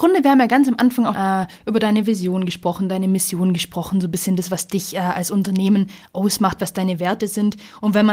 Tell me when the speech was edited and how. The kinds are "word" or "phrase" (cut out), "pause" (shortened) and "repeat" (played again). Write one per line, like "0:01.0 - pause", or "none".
0:01.1 - word